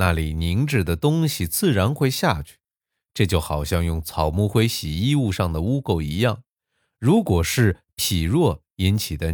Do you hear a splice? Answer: no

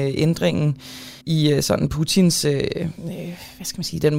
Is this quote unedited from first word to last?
no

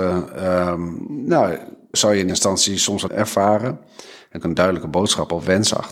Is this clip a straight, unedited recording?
no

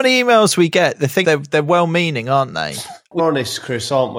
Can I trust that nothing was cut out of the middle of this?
no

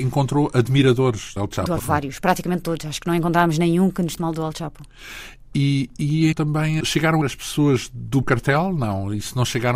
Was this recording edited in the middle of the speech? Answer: yes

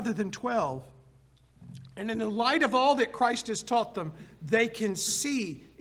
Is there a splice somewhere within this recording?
no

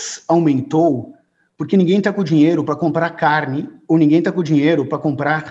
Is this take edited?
no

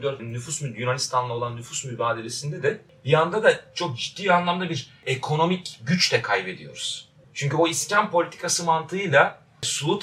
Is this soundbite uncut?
yes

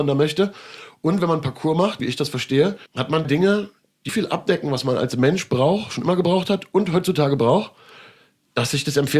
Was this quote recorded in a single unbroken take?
no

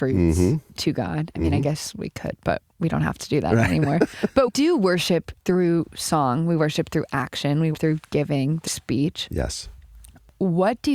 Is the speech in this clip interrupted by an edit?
yes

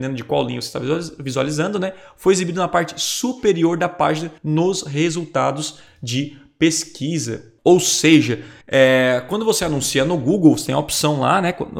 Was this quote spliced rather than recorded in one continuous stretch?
yes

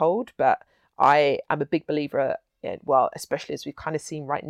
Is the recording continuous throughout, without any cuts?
yes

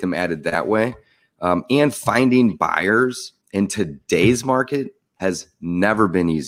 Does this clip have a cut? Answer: yes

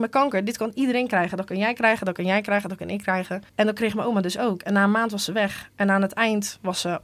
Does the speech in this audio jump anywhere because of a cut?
yes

